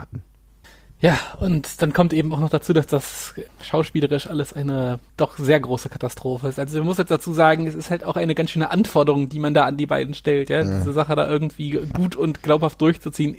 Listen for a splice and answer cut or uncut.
cut